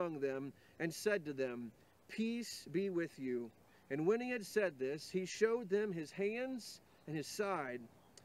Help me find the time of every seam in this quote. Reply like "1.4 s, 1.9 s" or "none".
none

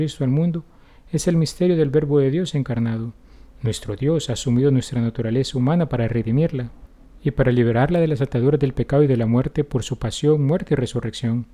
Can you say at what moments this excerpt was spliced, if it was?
none

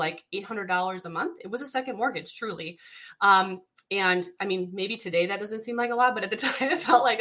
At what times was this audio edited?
none

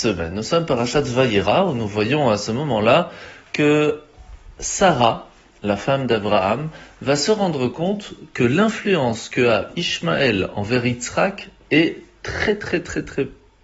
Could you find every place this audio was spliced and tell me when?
none

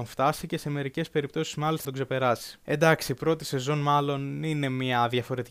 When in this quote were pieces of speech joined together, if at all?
1.8 s, 2.6 s

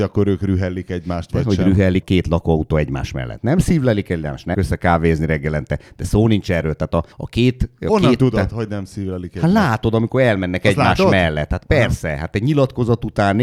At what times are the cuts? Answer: 2.0 s, 4.5 s, 7.1 s

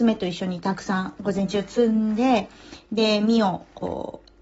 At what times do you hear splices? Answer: none

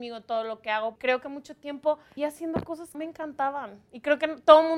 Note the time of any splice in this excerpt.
1.0 s, 2.2 s, 2.9 s

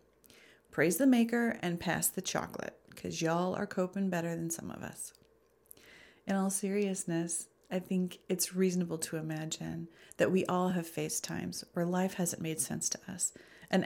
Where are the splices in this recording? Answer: none

